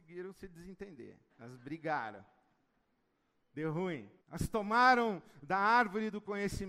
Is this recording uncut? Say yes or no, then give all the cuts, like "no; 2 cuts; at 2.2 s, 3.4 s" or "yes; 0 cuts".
no; 2 cuts; at 1.3 s, 4.2 s